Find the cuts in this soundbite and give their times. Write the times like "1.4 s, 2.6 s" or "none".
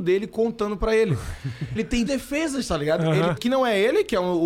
1.7 s, 2.1 s, 3.4 s